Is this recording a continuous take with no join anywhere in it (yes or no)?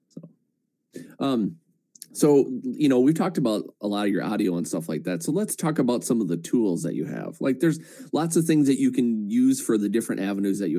yes